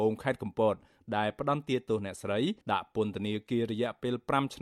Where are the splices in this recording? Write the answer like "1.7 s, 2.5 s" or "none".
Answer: 2.6 s